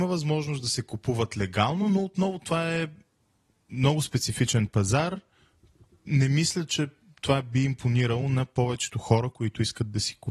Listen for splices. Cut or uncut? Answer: uncut